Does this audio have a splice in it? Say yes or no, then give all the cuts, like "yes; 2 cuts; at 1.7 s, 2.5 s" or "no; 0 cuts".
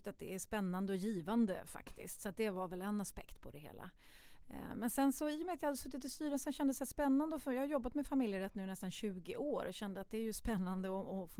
no; 0 cuts